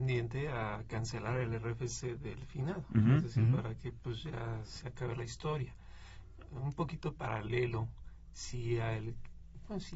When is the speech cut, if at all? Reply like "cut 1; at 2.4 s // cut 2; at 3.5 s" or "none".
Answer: none